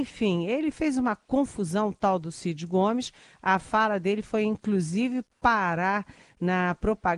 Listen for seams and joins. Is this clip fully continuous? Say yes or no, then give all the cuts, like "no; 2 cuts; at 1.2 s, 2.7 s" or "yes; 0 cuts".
yes; 0 cuts